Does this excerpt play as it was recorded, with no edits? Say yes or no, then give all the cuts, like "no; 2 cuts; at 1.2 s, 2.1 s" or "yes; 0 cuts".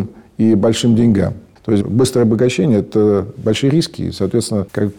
yes; 0 cuts